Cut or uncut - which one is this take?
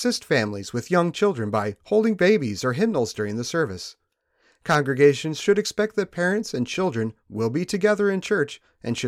uncut